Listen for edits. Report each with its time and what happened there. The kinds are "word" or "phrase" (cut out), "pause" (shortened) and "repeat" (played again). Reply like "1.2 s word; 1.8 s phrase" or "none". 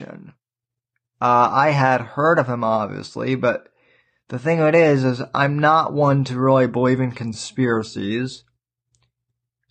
none